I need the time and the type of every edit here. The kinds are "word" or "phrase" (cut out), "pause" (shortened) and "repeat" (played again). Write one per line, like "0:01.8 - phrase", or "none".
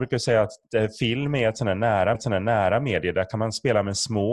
0:02.1 - repeat